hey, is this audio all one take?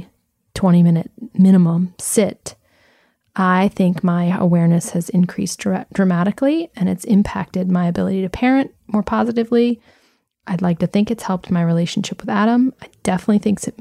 yes; 0 cuts

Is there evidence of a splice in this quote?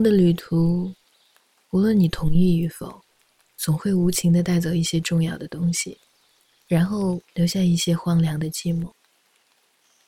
yes; 1 cut; at 7.2 s

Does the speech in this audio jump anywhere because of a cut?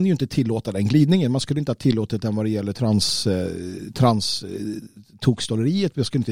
no; 0 cuts

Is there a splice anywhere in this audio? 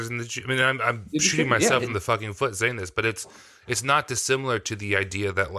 no; 0 cuts

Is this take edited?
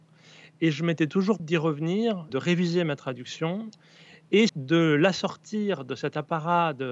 yes; 3 cuts; at 1.4 s, 2.3 s, 4.5 s

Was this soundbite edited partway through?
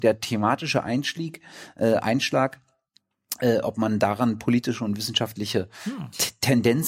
no; 0 cuts

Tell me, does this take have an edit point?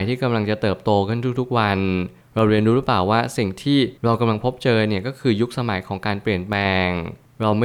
yes; 1 cut; at 4.0 s

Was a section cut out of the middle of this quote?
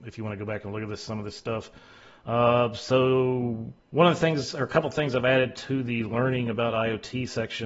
yes; 1 cut; at 3.8 s

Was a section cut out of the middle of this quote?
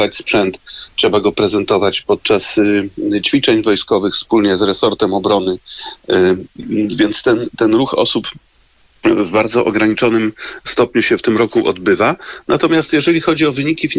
no; 0 cuts

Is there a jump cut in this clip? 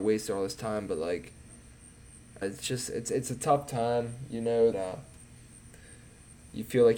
yes; 2 cuts; at 2.4 s, 4.7 s

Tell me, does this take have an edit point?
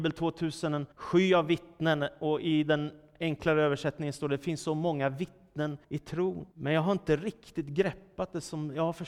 yes; 3 cuts; at 0.9 s, 5.8 s, 6.5 s

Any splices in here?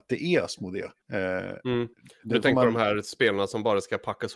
yes; 2 cuts; at 1.0 s, 1.9 s

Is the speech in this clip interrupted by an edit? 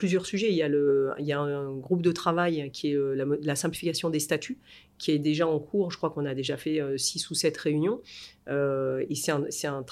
no; 0 cuts

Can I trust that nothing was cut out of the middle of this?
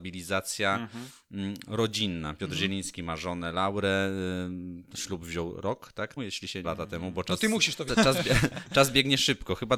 no; 3 cuts; at 6.2 s, 6.6 s, 7.9 s

